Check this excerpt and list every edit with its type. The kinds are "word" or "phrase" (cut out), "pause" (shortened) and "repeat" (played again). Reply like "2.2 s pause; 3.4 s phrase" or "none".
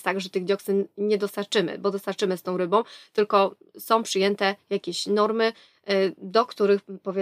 none